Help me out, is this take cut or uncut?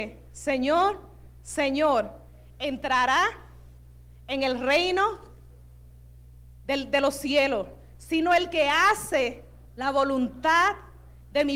cut